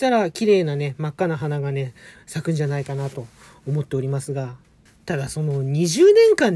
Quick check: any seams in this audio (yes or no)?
no